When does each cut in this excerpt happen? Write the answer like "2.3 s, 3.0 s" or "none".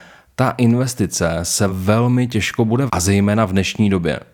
1.7 s, 2.9 s